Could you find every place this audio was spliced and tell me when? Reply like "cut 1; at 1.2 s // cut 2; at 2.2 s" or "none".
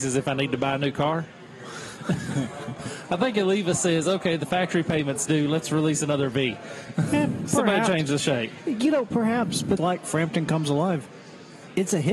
cut 1; at 9.8 s